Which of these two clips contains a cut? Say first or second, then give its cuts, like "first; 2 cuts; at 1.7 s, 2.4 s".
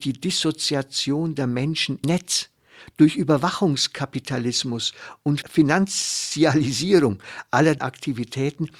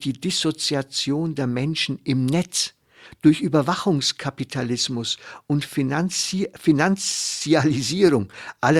first; 3 cuts; at 2.0 s, 5.4 s, 7.8 s